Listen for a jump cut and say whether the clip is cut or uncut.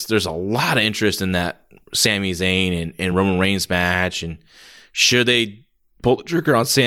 uncut